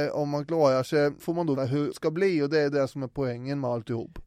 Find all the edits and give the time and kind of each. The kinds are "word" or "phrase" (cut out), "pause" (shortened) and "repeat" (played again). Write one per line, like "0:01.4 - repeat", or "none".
0:01.2 - word
0:01.6 - word
0:01.9 - word